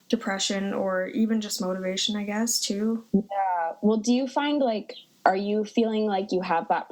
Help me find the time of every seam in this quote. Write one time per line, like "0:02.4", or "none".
0:03.1